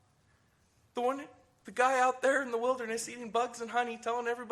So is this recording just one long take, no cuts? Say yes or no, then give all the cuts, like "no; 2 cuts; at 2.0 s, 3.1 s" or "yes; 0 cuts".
yes; 0 cuts